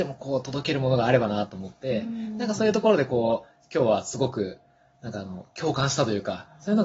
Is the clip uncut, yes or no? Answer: yes